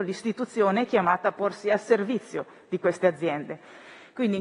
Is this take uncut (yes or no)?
yes